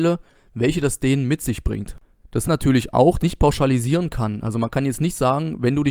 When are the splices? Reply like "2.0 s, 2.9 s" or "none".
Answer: 2.4 s, 3.2 s